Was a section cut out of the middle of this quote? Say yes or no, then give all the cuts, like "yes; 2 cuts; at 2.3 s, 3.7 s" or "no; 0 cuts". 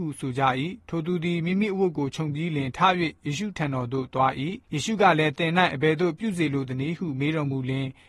yes; 1 cut; at 4.6 s